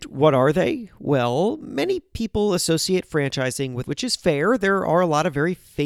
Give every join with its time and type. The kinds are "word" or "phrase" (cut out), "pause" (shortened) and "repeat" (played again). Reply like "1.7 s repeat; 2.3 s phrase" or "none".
3.9 s word